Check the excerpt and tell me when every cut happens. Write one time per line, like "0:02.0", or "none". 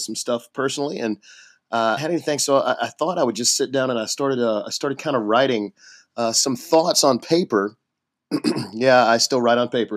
0:02.0